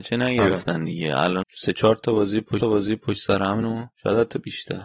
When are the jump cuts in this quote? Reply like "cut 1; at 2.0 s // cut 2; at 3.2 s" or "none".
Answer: cut 1; at 1.4 s // cut 2; at 2.6 s // cut 3; at 3.6 s // cut 4; at 3.9 s